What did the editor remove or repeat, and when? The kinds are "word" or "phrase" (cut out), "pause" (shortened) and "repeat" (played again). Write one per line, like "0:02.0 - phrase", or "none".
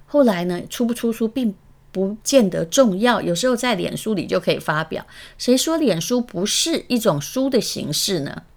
0:02.2 - pause

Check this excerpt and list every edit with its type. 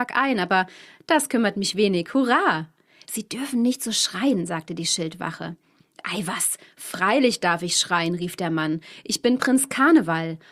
none

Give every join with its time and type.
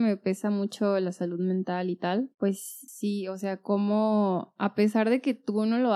none

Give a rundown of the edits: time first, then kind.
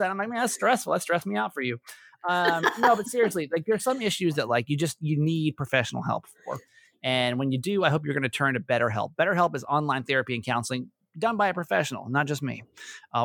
none

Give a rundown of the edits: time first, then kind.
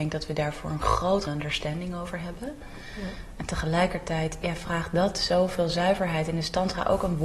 0:01.3 - phrase

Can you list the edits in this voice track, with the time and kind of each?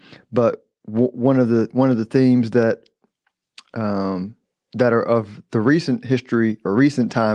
none

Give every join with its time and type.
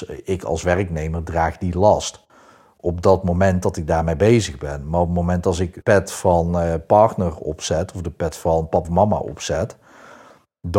0:05.8 - word
0:08.8 - word

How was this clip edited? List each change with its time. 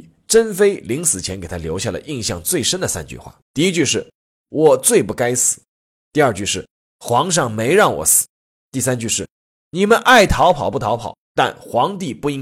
0:03.4 - pause
0:08.3 - pause

